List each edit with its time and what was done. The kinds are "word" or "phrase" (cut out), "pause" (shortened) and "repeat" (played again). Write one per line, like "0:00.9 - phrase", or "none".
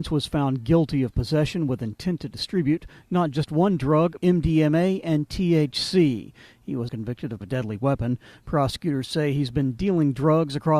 0:04.2 - phrase
0:06.9 - word
0:07.4 - phrase

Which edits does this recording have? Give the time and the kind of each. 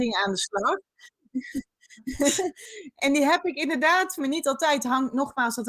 0:03.0 - word
0:04.2 - phrase

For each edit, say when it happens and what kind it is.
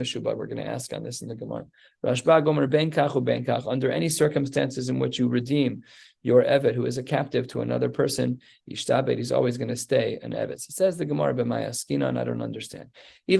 none

